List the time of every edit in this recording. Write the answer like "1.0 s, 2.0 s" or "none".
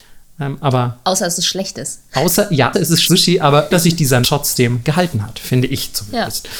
2.7 s, 3.0 s, 3.7 s, 4.2 s